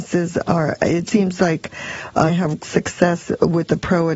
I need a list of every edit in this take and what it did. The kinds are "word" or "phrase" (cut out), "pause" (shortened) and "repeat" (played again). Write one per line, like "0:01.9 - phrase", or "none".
0:01.1 - word
0:02.3 - phrase
0:02.6 - word